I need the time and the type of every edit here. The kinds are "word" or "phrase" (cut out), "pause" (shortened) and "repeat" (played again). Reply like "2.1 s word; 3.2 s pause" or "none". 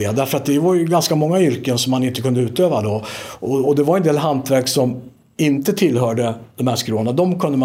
none